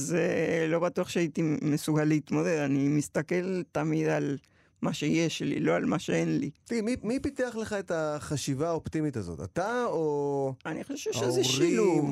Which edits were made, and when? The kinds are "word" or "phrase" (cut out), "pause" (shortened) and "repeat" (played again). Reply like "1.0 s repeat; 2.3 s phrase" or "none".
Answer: 6.6 s pause